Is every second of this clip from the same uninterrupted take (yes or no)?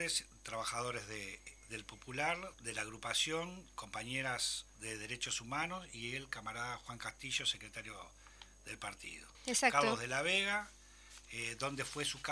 no